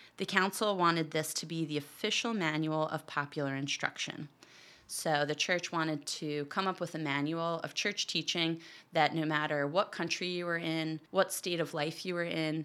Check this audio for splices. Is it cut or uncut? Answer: cut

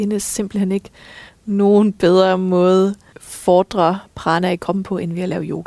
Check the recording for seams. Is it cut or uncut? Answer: cut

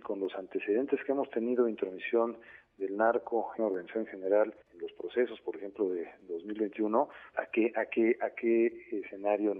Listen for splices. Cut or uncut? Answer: cut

